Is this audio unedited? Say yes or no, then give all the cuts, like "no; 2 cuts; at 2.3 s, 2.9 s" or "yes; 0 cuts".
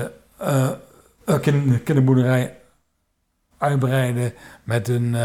yes; 0 cuts